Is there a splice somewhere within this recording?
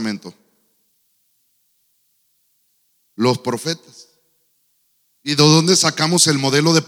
no; 0 cuts

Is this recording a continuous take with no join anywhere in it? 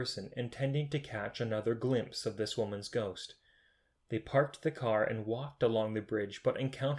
yes; 0 cuts

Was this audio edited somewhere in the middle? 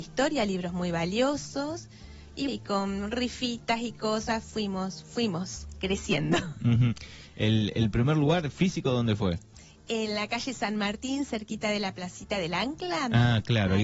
yes; 1 cut; at 2.5 s

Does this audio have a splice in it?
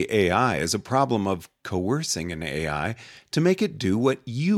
no; 0 cuts

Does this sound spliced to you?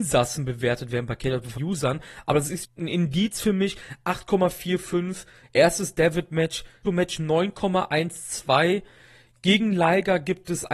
yes; 3 cuts; at 1.6 s, 2.6 s, 6.8 s

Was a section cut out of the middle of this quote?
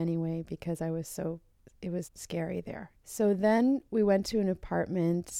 yes; 3 cuts; at 1.6 s, 2.0 s, 3.0 s

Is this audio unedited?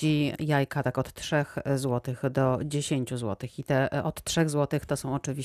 yes; 0 cuts

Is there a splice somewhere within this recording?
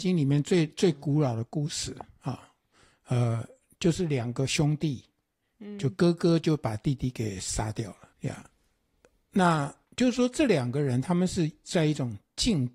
yes; 2 cuts; at 8.1 s, 9.8 s

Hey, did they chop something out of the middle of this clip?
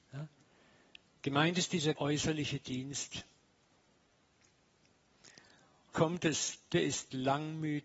yes; 3 cuts; at 1.9 s, 5.9 s, 6.7 s

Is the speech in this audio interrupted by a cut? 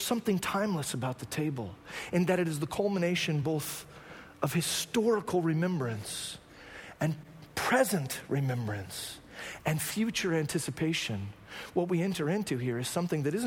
no; 0 cuts

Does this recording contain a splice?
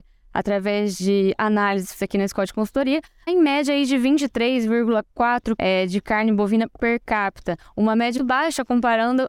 yes; 4 cuts; at 2.0 s, 3.3 s, 5.6 s, 8.2 s

